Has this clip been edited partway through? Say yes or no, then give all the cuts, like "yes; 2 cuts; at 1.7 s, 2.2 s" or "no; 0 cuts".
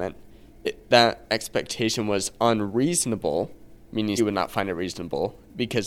yes; 1 cut; at 4.2 s